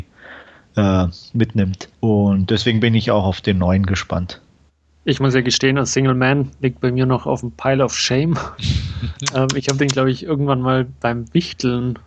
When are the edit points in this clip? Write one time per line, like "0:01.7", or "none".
0:01.9
0:04.7